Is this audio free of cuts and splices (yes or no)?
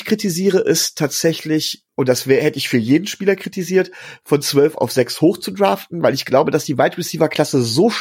no